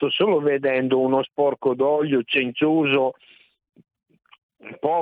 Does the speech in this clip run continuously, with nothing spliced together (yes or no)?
no